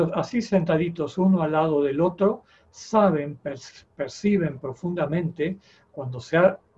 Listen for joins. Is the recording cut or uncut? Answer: uncut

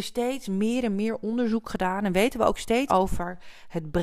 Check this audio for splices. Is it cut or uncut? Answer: cut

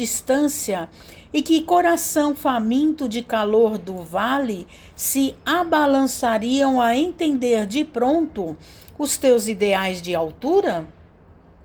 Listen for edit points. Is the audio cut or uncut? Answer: uncut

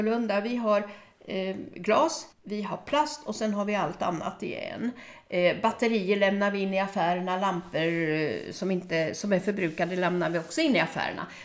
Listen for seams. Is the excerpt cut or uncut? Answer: cut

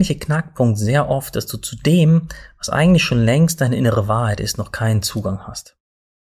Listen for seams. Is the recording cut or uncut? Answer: uncut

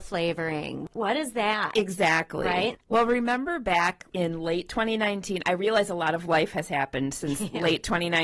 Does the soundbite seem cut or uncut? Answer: uncut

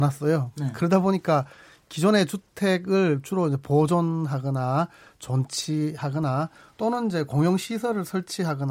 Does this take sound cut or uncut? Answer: uncut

